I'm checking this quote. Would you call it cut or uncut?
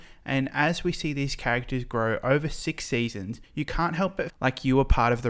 cut